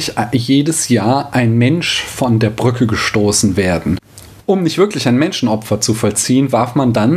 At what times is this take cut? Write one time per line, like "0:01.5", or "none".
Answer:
none